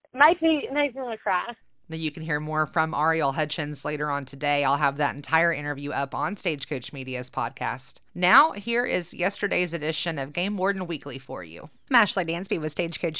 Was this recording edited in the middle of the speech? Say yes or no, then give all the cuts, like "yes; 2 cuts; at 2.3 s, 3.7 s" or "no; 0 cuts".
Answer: yes; 1 cut; at 8.1 s